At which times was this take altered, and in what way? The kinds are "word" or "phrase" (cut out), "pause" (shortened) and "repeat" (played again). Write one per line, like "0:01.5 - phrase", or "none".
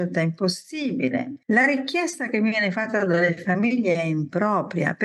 0:01.4 - pause